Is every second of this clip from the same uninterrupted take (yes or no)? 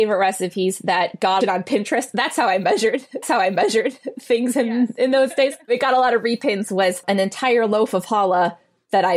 no